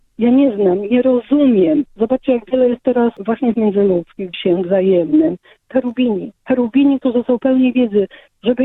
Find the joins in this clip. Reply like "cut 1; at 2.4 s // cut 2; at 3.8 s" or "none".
cut 1; at 1.9 s // cut 2; at 3.2 s // cut 3; at 3.5 s // cut 4; at 4.3 s // cut 5; at 5.7 s // cut 6; at 6.4 s